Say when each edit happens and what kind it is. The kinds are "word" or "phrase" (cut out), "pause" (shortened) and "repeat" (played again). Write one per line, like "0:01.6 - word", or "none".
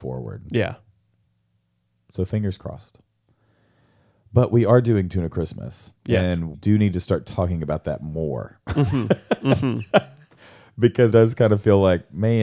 0:06.5 - word
0:11.1 - word